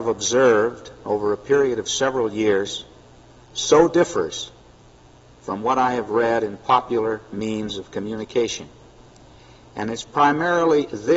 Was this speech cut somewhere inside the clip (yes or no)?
no